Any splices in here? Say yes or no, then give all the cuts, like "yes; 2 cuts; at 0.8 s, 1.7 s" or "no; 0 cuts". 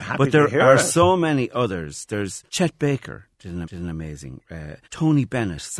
yes; 3 cuts; at 2.5 s, 3.6 s, 4.8 s